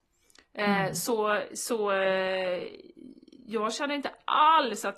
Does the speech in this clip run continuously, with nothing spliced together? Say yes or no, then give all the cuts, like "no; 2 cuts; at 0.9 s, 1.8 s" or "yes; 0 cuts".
yes; 0 cuts